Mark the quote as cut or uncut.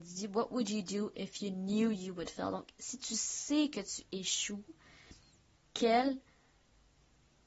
uncut